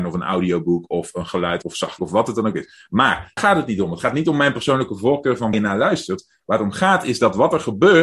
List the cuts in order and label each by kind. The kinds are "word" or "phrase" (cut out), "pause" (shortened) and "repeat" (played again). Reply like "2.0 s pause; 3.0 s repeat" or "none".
1.6 s word; 2.0 s word; 3.4 s word; 5.5 s word